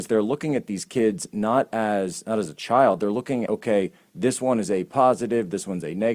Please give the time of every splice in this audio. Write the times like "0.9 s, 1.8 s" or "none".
3.5 s